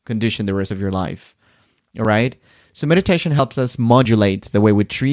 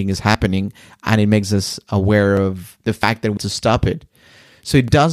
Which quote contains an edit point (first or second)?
second